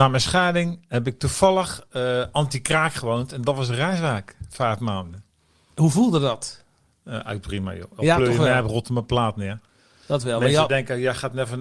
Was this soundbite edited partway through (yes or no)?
no